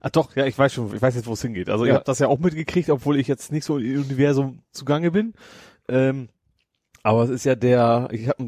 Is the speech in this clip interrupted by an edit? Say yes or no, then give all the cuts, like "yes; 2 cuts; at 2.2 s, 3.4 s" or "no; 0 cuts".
no; 0 cuts